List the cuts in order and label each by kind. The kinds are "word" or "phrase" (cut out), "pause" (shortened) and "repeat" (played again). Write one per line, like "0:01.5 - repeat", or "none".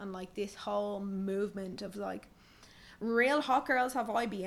none